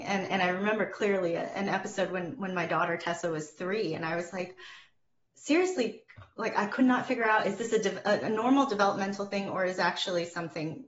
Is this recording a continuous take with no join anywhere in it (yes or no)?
yes